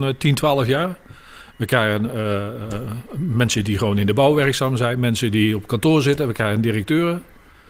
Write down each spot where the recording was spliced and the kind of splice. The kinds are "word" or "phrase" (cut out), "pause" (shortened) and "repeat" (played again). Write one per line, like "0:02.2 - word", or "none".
none